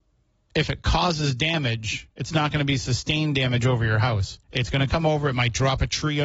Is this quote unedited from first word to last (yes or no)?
no